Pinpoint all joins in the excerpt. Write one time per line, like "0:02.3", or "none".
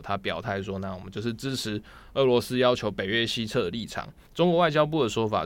0:04.3